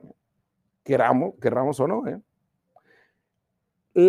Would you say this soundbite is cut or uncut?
uncut